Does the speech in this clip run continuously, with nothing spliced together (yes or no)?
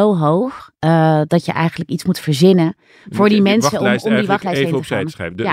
yes